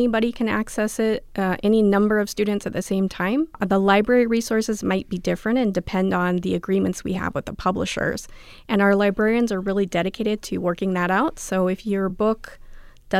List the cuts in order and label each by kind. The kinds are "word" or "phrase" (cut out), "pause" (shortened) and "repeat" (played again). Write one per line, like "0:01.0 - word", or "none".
none